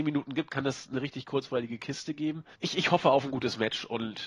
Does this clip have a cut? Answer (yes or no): yes